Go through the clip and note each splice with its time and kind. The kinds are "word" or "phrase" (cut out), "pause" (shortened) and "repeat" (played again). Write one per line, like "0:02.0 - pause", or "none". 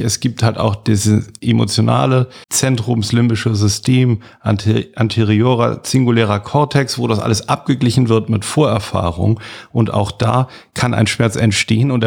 0:02.4 - pause